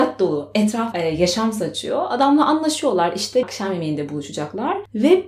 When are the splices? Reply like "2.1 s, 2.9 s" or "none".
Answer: 0.9 s, 3.4 s